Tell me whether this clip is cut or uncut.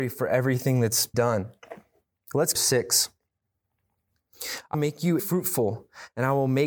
cut